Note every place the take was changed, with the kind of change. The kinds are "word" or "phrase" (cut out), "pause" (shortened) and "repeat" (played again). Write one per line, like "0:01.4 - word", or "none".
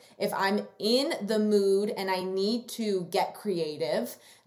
none